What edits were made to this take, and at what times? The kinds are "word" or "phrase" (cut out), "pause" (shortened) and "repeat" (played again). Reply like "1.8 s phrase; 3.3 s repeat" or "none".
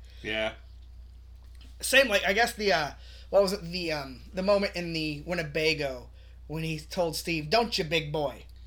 none